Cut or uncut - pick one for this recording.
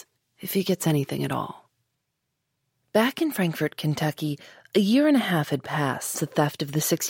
cut